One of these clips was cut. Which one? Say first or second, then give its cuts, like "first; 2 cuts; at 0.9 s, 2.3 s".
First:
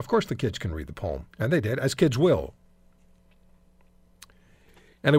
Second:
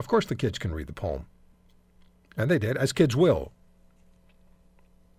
first; 1 cut; at 1.3 s